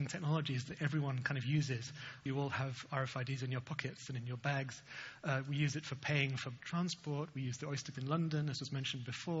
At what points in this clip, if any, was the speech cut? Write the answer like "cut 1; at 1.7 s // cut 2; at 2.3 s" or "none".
cut 1; at 2.3 s // cut 2; at 6.6 s // cut 3; at 7.9 s

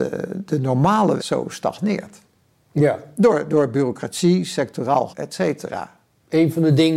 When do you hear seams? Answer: cut 1; at 1.2 s // cut 2; at 5.1 s

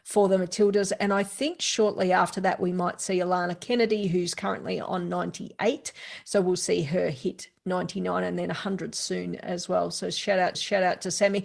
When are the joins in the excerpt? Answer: cut 1; at 10.5 s

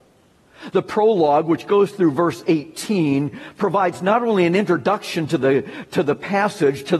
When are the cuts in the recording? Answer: none

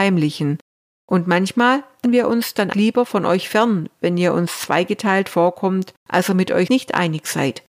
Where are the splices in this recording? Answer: cut 1; at 2.0 s // cut 2; at 2.7 s // cut 3; at 6.0 s // cut 4; at 6.7 s

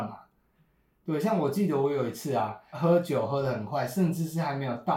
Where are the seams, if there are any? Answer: cut 1; at 2.7 s

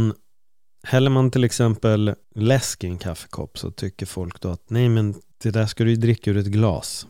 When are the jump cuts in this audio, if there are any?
cut 1; at 2.2 s // cut 2; at 5.3 s

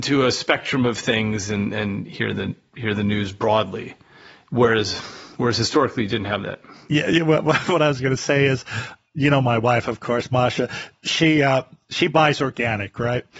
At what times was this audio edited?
none

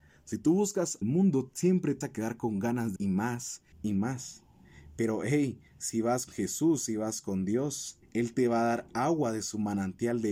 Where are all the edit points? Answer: cut 1; at 1.0 s // cut 2; at 2.0 s // cut 3; at 3.0 s // cut 4; at 3.7 s // cut 5; at 5.7 s // cut 6; at 6.3 s // cut 7; at 8.0 s

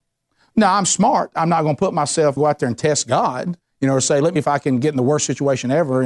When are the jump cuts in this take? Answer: cut 1; at 2.4 s // cut 2; at 3.6 s // cut 3; at 4.4 s

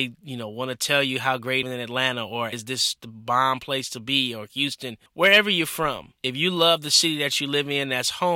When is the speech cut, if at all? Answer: cut 1; at 1.6 s // cut 2; at 2.5 s // cut 3; at 3.0 s // cut 4; at 5.1 s // cut 5; at 6.2 s

